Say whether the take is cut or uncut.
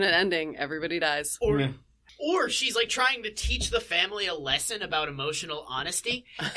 uncut